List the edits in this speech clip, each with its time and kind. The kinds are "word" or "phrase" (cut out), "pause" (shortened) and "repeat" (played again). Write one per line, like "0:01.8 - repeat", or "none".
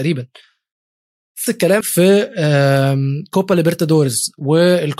0:01.5 - word
0:01.8 - word